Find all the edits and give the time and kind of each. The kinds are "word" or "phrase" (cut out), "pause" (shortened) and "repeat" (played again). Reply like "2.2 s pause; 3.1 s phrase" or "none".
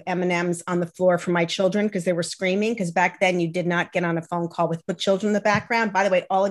4.9 s word